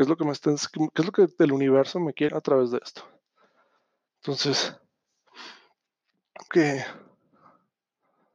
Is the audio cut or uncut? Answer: cut